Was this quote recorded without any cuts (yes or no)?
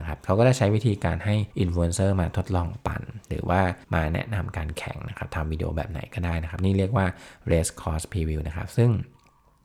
no